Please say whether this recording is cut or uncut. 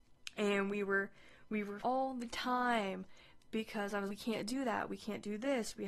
cut